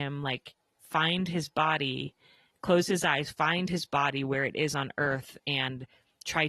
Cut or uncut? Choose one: uncut